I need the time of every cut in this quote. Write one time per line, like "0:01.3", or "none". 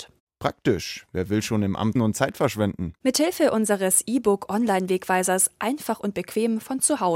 0:02.0